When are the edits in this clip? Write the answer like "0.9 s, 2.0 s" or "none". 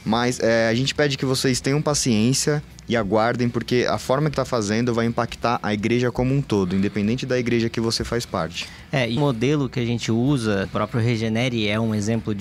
4.3 s, 9.2 s, 10.6 s